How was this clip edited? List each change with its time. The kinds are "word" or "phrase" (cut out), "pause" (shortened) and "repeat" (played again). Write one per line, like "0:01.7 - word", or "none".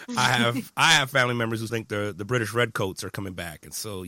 0:01.7 - word